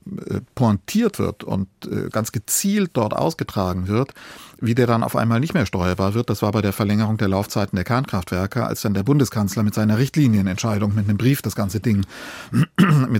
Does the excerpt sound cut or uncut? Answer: cut